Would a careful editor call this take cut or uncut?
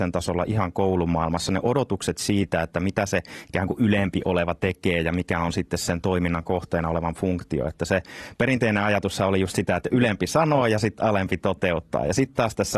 uncut